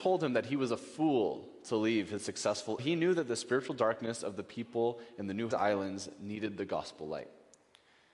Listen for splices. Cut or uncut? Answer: cut